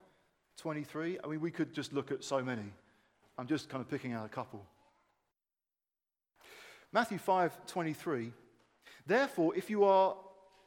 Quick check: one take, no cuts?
yes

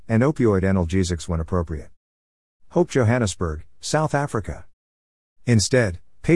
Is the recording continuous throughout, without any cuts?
yes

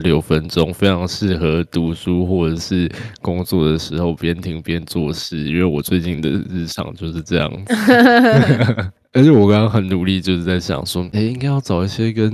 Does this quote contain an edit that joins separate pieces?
yes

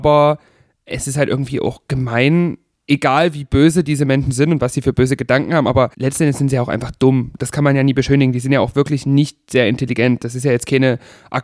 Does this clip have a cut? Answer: yes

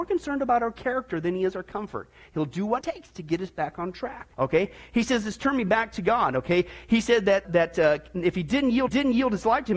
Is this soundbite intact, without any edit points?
no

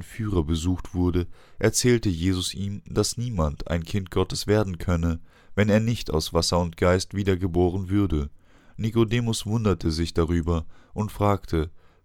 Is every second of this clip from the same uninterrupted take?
yes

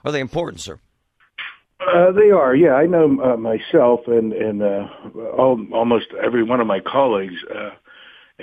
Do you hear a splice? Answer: no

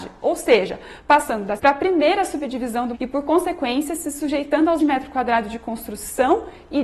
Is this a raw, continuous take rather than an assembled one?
no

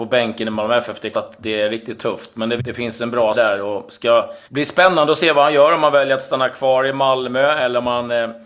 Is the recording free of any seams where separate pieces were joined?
no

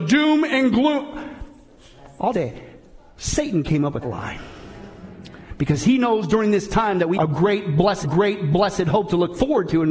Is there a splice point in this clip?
yes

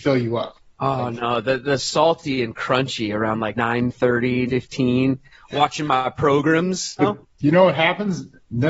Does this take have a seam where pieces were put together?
yes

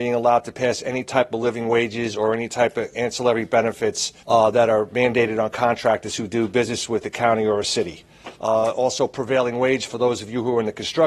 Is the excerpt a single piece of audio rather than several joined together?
no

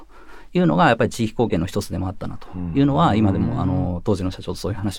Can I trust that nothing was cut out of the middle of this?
yes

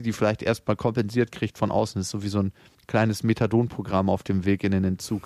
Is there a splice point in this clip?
yes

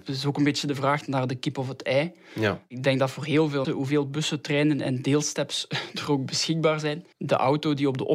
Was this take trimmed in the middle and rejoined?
yes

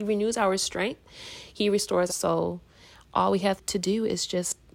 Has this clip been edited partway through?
yes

